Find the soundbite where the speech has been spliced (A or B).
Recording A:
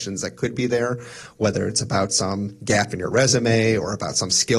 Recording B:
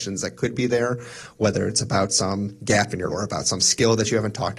B